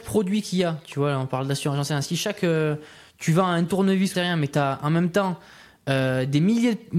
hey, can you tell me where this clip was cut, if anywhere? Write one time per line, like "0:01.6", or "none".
0:04.1